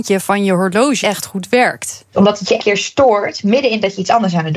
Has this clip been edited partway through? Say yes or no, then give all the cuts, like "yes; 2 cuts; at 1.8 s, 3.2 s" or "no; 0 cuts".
yes; 2 cuts; at 1.0 s, 2.6 s